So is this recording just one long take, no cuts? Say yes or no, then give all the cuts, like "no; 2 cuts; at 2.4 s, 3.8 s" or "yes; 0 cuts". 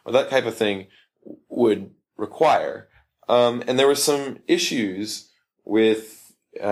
yes; 0 cuts